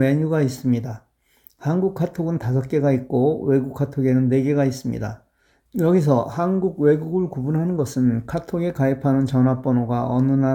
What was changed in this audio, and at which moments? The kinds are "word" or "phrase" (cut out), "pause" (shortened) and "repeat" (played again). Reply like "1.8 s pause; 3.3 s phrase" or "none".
none